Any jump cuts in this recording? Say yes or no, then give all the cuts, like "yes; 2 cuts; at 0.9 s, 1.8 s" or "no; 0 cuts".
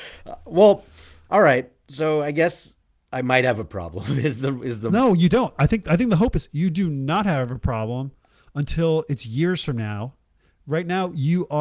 no; 0 cuts